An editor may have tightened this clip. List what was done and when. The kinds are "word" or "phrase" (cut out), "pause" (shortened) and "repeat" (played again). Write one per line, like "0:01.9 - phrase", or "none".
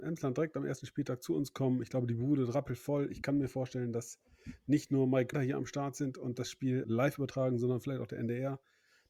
0:05.3 - phrase
0:06.8 - word